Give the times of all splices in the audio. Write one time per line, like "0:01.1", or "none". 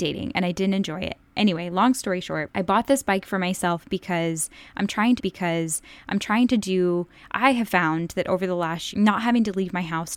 0:05.2
0:08.9